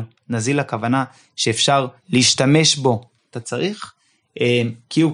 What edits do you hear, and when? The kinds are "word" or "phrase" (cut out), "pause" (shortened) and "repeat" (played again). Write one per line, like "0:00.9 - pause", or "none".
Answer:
0:02.0 - pause
0:03.3 - phrase

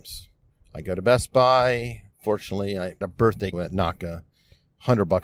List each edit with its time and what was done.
0:02.1 - pause
0:03.0 - word
0:03.5 - phrase
0:04.0 - word

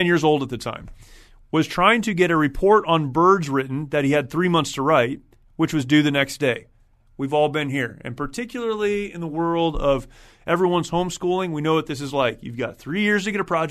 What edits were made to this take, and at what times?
none

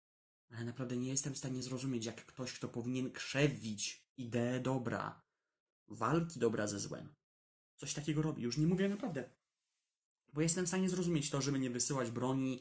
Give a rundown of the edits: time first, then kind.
none

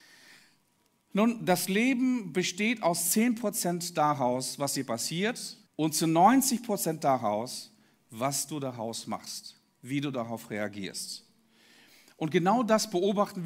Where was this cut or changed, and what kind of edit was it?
0:05.7 - pause

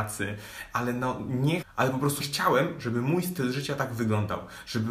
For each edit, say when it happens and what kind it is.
0:01.6 - word
0:02.2 - word

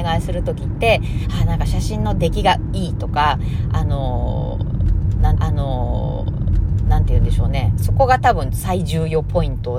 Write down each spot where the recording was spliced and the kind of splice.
0:05.4 - repeat

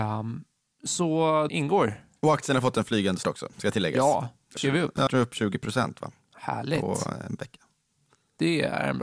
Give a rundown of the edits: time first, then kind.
0:01.5 - word
0:03.2 - word
0:04.6 - word
0:05.1 - word

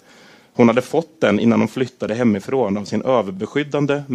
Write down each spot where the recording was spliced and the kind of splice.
none

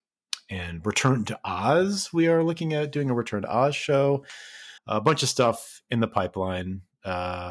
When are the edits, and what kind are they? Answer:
0:04.8 - pause

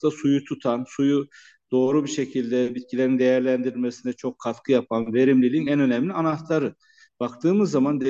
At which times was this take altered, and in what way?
none

